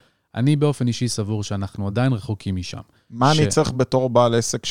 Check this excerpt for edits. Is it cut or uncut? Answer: uncut